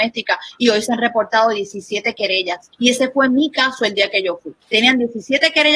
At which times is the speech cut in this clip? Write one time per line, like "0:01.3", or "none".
0:02.7
0:04.6